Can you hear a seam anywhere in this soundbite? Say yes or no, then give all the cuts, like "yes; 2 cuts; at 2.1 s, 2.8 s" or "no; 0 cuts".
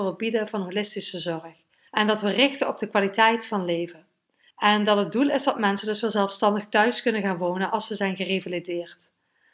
no; 0 cuts